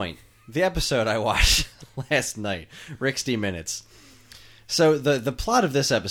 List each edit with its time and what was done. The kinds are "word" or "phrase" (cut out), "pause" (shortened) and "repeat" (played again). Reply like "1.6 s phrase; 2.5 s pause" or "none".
none